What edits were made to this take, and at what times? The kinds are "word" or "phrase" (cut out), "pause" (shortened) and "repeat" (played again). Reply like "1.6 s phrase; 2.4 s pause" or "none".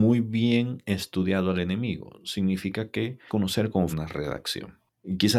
3.3 s word; 3.9 s word